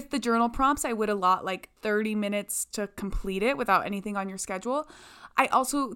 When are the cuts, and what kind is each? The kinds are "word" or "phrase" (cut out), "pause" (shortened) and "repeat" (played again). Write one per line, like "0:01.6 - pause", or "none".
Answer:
0:01.8 - pause
0:02.7 - word